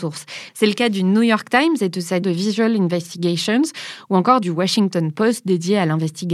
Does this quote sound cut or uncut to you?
cut